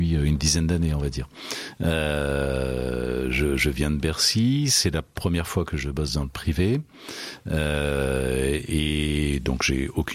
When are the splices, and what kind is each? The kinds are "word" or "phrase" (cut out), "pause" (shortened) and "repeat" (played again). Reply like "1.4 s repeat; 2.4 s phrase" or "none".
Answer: none

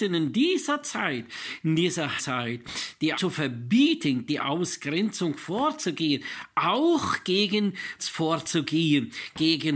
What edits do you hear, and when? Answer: 2.2 s word; 3.1 s word; 4.3 s word; 8.0 s word

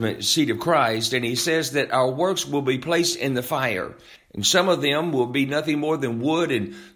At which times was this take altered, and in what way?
4.2 s pause

